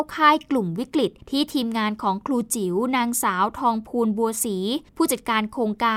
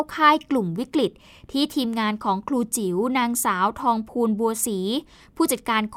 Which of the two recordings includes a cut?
first; 2 cuts; at 1.2 s, 4.9 s

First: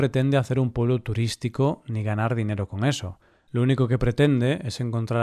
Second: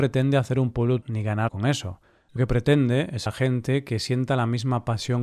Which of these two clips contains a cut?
second; 4 cuts; at 1.0 s, 1.5 s, 2.4 s, 3.3 s

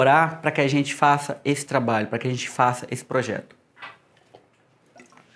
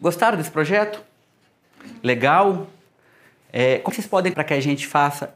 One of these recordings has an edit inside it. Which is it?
second; 2 cuts; at 3.9 s, 4.3 s

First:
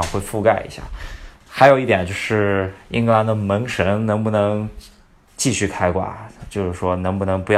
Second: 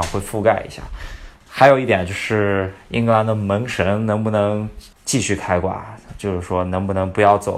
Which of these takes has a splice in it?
second; 1 cut; at 4.9 s

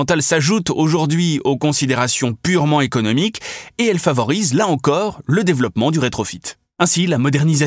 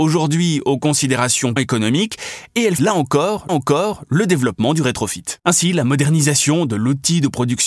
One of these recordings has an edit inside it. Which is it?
second; 4 cuts; at 1.6 s, 2.8 s, 3.5 s, 5.4 s

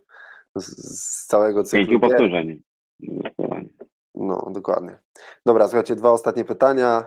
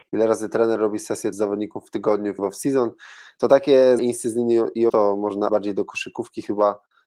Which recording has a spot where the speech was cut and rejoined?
second; 5 cuts; at 1.3 s, 2.4 s, 4.0 s, 4.9 s, 5.5 s

